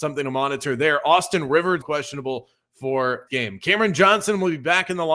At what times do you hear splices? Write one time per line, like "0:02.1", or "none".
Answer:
0:01.8
0:03.3